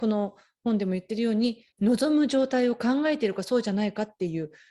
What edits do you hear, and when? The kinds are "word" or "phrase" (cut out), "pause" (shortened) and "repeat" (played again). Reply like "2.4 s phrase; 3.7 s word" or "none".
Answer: 1.7 s pause